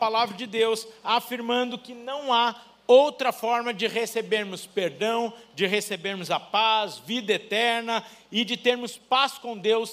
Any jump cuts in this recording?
no; 0 cuts

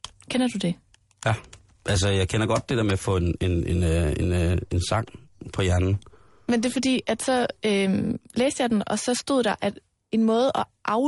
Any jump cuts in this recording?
no; 0 cuts

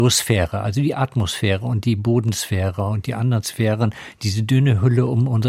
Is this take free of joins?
yes; 0 cuts

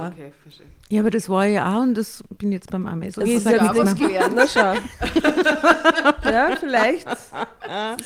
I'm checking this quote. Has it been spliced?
no; 0 cuts

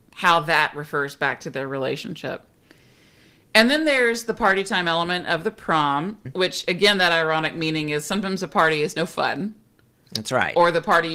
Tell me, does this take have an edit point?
no; 0 cuts

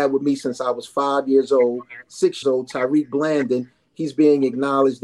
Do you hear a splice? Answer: yes; 1 cut; at 2.4 s

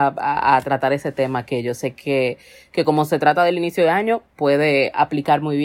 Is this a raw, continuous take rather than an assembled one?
yes; 0 cuts

